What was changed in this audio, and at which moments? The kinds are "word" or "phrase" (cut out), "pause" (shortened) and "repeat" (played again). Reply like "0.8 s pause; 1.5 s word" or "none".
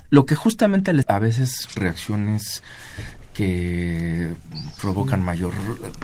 1.0 s word; 1.8 s word